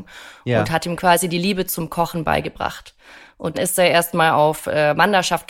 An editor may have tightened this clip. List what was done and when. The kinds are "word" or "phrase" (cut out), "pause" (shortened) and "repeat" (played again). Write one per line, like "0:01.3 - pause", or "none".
0:03.5 - word

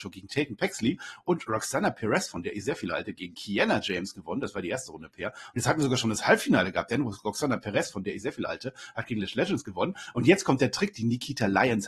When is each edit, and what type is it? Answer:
none

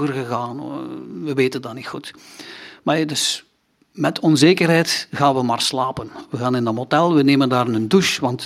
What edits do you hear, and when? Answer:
none

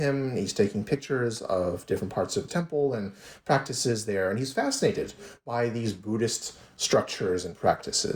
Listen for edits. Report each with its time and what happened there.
0:02.5 - word

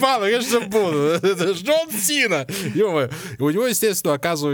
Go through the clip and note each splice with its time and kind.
none

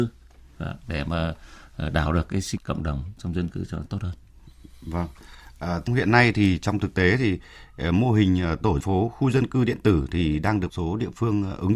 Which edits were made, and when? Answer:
0:02.1 - word
0:02.6 - word
0:05.9 - word
0:08.8 - word
0:10.7 - word

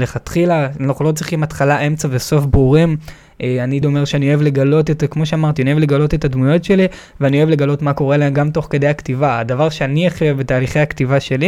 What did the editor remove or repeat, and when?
0:03.8 - word

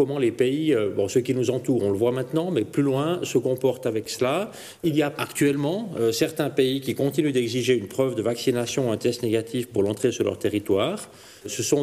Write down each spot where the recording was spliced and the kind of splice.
none

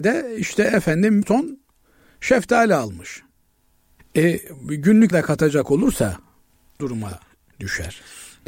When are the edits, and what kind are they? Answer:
0:01.2 - word
0:05.1 - word
0:06.8 - word

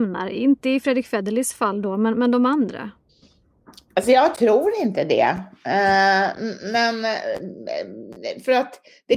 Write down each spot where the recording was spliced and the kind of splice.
none

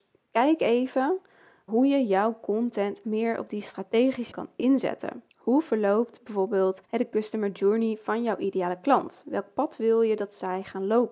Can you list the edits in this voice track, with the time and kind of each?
0:01.7 - word
0:03.0 - word
0:04.3 - word
0:05.3 - pause
0:06.8 - pause

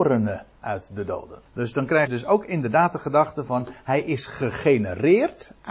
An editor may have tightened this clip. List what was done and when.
0:01.5 - pause
0:02.1 - word

